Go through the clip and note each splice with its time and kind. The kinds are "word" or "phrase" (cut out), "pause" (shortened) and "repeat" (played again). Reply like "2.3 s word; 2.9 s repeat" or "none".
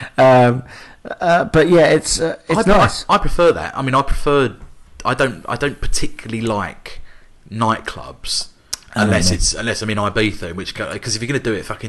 none